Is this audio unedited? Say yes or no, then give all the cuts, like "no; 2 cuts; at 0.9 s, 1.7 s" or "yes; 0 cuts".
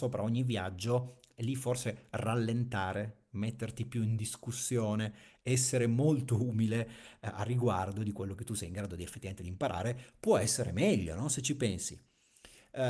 yes; 0 cuts